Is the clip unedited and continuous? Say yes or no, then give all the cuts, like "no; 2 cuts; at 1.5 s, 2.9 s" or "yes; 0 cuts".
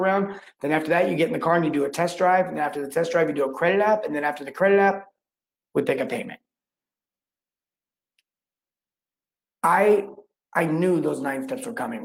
yes; 0 cuts